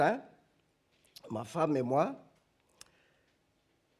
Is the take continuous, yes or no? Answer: yes